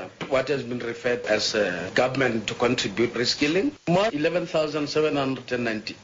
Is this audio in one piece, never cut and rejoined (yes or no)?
no